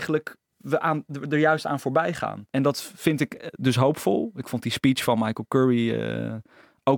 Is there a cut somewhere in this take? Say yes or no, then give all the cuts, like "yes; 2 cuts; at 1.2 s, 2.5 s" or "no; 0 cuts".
yes; 1 cut; at 2.5 s